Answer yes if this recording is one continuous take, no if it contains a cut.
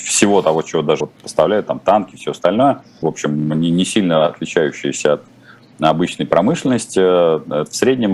no